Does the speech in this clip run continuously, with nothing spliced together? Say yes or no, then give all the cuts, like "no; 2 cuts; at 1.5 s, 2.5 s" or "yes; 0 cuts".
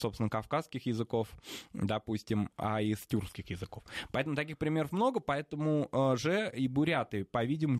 yes; 0 cuts